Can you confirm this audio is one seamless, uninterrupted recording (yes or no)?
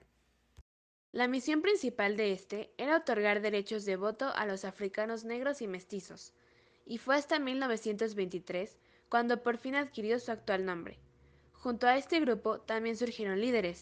yes